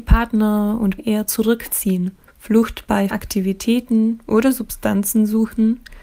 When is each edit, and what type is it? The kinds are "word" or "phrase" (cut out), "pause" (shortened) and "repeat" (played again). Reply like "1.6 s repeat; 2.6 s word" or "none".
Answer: 1.0 s word; 2.3 s pause; 3.1 s word